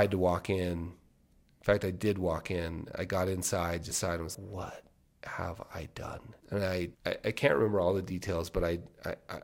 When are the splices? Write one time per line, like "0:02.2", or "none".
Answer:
0:03.9
0:04.3
0:06.4
0:06.9